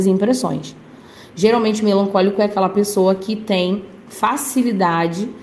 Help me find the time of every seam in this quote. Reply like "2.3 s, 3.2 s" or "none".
none